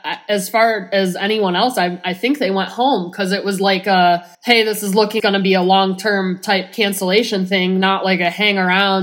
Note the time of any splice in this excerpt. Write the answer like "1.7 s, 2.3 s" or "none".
4.3 s, 5.2 s